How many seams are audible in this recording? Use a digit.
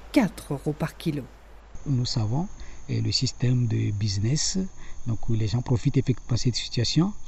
0